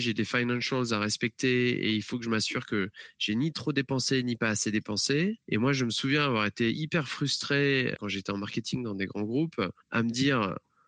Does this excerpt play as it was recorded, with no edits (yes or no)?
no